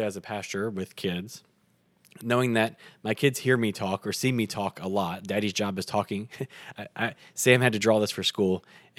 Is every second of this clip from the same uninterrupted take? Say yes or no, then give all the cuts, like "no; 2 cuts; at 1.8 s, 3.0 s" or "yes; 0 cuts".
yes; 0 cuts